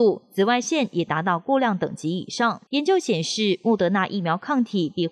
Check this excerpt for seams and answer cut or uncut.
cut